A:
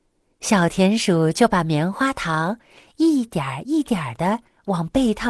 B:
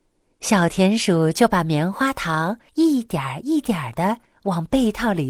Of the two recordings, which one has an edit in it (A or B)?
B